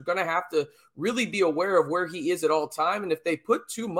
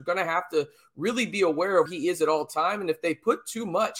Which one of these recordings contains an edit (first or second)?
second